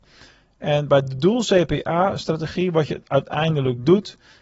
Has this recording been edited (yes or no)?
no